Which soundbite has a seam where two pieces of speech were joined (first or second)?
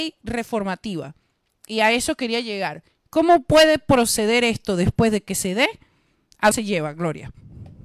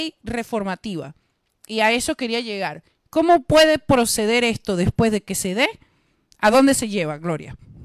first